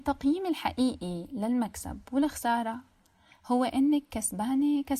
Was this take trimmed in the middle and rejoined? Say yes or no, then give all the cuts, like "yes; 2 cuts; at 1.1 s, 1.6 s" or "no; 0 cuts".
no; 0 cuts